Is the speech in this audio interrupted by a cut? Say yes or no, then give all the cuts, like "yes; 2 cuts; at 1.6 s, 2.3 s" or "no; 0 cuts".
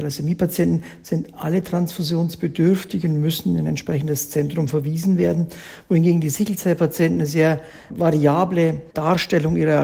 yes; 1 cut; at 8.9 s